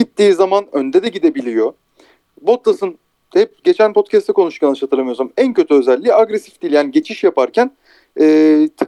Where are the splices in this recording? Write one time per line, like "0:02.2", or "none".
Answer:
none